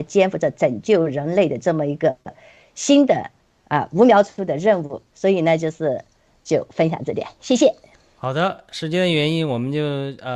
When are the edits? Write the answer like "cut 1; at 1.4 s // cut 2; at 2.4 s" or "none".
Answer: none